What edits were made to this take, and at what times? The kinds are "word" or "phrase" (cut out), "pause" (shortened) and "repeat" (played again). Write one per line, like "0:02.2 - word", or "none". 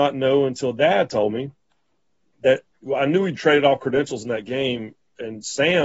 none